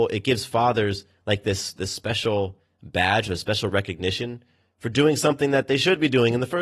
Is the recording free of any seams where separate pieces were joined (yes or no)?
yes